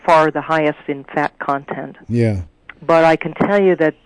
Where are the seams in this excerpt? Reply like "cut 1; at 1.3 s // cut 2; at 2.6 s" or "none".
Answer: none